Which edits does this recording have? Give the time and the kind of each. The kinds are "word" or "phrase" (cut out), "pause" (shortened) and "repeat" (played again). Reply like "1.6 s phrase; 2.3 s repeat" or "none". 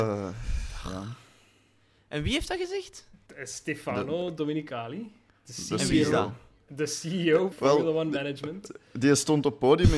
7.5 s word